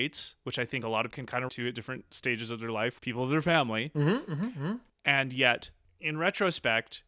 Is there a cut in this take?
yes; 3 cuts; at 1.1 s, 1.5 s, 3.0 s

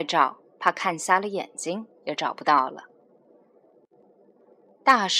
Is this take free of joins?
yes; 0 cuts

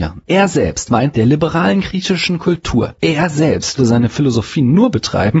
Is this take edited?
yes; 2 cuts; at 1.1 s, 3.8 s

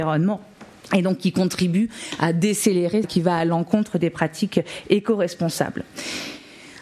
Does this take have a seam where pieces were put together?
yes; 1 cut; at 3.0 s

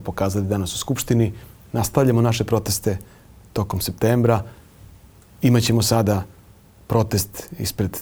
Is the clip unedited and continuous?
yes; 0 cuts

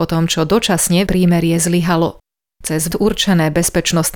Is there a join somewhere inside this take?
yes; 2 cuts; at 1.1 s, 2.9 s

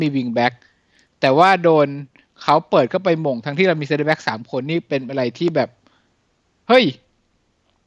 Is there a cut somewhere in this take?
no; 0 cuts

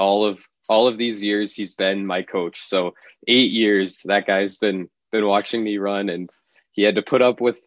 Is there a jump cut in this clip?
no; 0 cuts

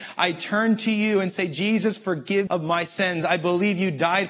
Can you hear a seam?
yes; 1 cut; at 2.5 s

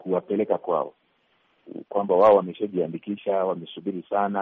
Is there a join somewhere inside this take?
no; 0 cuts

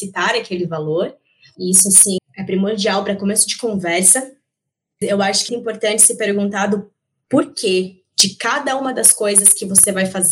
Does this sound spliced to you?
yes; 3 cuts; at 2.2 s, 5.0 s, 5.5 s

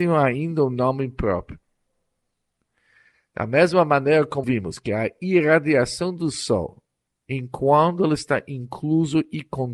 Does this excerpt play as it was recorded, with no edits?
no; 1 cut; at 4.4 s

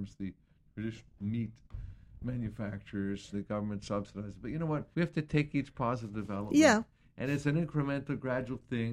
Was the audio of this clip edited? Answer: yes; 3 cuts; at 1.2 s, 3.3 s, 4.9 s

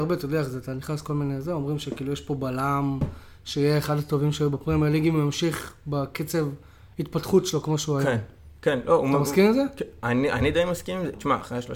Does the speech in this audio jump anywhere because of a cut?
no; 0 cuts

